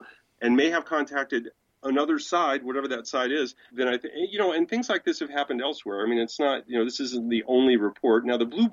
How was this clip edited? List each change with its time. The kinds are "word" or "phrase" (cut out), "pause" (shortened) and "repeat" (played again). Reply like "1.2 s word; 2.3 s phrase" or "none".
3.7 s word